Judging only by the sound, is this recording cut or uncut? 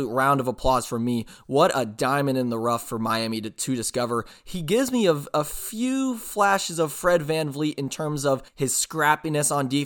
cut